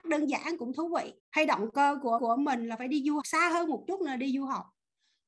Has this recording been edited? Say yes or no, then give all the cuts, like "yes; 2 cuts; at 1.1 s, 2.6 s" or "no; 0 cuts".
yes; 3 cuts; at 1.2 s, 2.2 s, 3.2 s